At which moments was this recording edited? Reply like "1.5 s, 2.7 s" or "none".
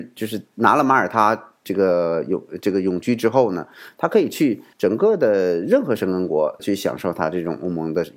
4.7 s, 6.6 s